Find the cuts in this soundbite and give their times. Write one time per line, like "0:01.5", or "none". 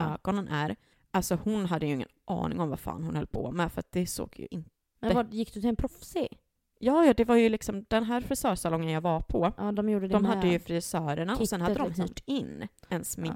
none